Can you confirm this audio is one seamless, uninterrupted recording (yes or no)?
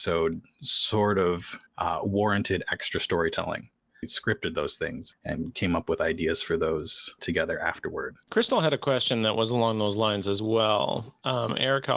no